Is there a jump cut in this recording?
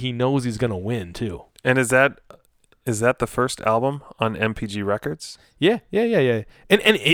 no; 0 cuts

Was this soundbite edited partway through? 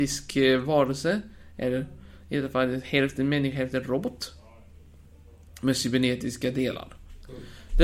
no; 0 cuts

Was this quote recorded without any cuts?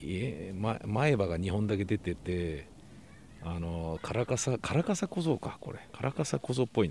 no; 1 cut; at 5.9 s

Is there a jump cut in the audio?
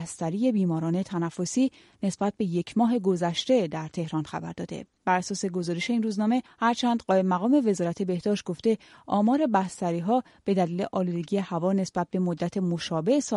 no; 0 cuts

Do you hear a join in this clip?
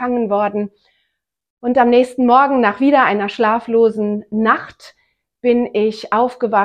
no; 0 cuts

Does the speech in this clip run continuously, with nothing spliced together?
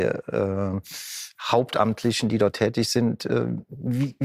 yes; 0 cuts

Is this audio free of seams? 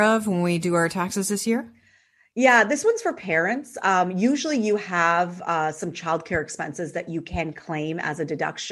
yes; 0 cuts

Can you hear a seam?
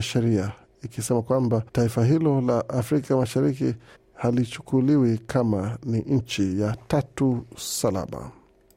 yes; 2 cuts; at 1.7 s, 3.9 s

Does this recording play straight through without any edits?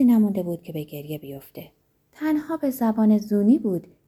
no; 1 cut; at 1.8 s

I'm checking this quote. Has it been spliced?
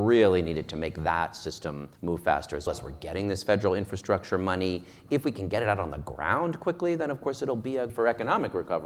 yes; 3 cuts; at 2.0 s, 2.7 s, 7.9 s

